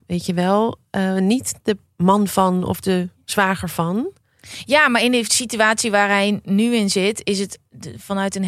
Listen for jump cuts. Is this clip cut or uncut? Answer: uncut